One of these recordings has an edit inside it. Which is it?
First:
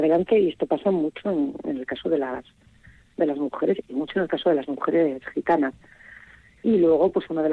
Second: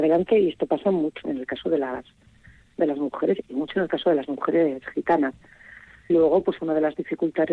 second; 2 cuts; at 1.2 s, 6.1 s

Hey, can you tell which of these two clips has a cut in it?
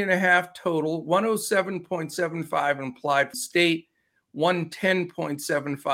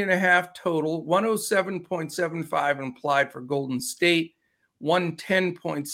first; 1 cut; at 3.3 s

